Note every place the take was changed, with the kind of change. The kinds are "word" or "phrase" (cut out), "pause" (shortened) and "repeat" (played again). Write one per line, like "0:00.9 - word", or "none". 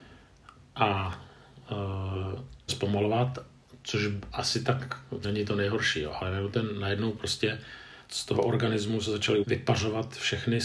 0:02.7 - phrase
0:05.2 - word
0:08.1 - word
0:09.4 - word

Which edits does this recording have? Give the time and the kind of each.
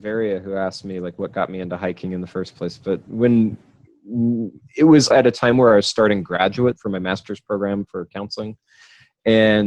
0:05.1 - word
0:06.8 - phrase

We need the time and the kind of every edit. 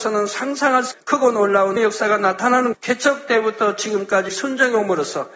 0:00.9 - word
0:01.8 - word
0:02.7 - word
0:04.3 - word

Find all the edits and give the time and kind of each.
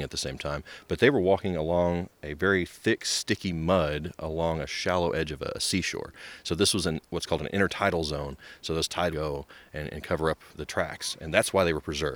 0:09.1 - phrase
0:10.5 - word

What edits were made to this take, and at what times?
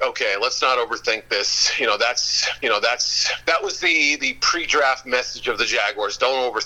0:02.6 - repeat

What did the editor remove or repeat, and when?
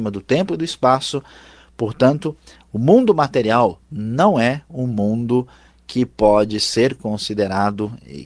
none

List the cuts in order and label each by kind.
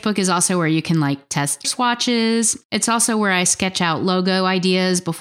0:01.6 - word
0:02.6 - pause

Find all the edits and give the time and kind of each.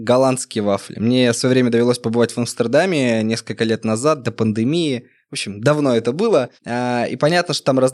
0:06.6 - pause

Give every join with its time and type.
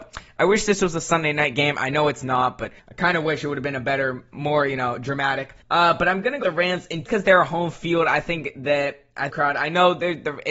0:02.8 - pause
0:05.6 - pause
0:06.4 - word
0:07.1 - word
0:09.3 - phrase

